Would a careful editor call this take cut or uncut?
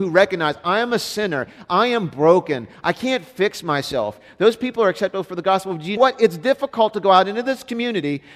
cut